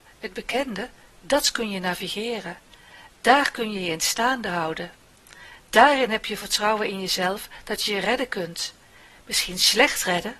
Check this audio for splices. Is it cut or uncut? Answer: uncut